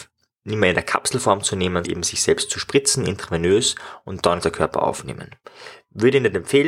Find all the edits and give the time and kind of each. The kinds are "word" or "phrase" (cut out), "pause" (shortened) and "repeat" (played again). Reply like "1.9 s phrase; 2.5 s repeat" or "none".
1.8 s word; 4.4 s word

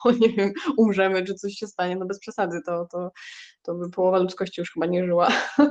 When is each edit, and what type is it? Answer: none

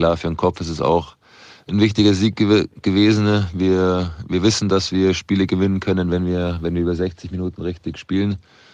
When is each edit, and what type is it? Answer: none

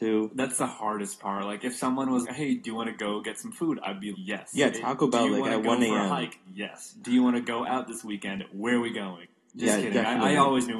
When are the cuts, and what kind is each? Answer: 2.2 s word; 4.1 s word

